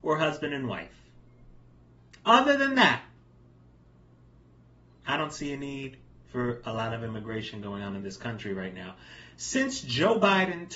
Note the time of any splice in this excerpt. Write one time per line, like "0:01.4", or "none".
none

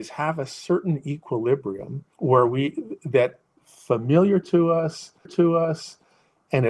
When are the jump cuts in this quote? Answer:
0:02.1
0:03.6
0:05.3

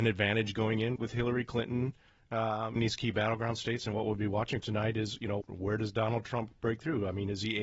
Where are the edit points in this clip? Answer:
0:01.0
0:02.8
0:04.6
0:05.4

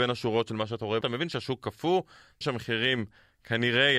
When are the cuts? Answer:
0:01.0
0:02.4

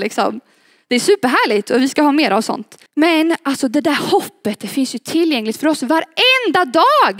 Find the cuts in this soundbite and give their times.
0:02.9

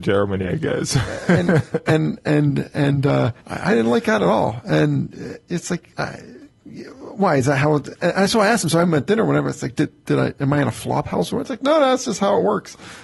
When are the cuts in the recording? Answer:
0:03.4
0:05.9

